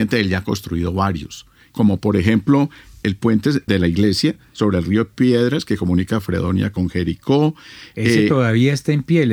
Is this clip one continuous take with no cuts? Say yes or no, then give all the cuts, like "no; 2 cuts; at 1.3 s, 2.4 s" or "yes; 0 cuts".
yes; 0 cuts